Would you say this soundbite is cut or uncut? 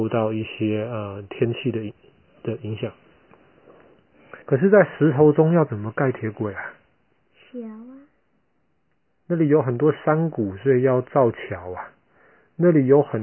cut